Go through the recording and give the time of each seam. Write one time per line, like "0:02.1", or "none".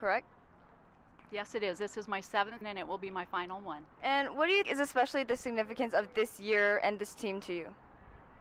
0:02.6
0:03.9
0:04.6